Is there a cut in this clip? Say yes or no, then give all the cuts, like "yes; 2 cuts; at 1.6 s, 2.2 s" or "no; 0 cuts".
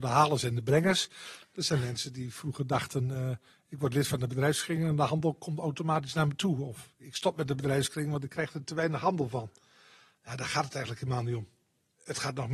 no; 0 cuts